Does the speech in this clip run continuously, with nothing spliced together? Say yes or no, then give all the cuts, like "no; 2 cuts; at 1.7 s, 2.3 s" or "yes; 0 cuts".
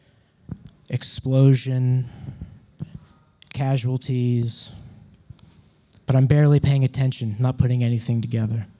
yes; 0 cuts